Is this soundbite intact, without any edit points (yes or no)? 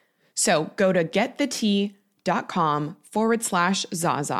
yes